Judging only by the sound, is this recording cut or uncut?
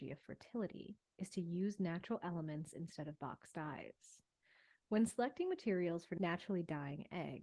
uncut